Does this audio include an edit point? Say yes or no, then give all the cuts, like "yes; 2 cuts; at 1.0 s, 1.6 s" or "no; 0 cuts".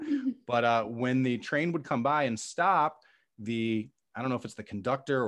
no; 0 cuts